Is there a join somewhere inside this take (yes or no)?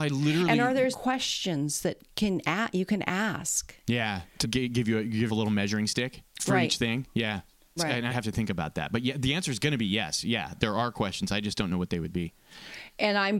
yes